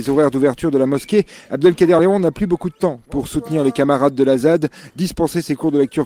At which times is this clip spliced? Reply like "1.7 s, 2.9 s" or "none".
none